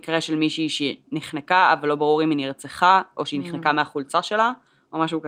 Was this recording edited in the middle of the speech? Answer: no; 0 cuts

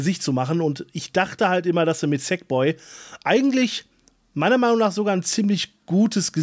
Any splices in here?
no; 0 cuts

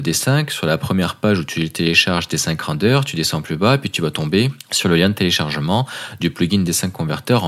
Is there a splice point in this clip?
no; 0 cuts

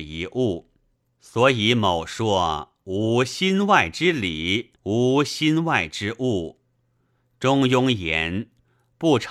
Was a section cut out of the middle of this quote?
yes; 2 cuts; at 0.9 s, 4.8 s

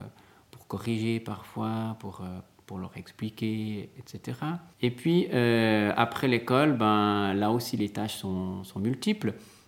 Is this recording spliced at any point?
no; 0 cuts

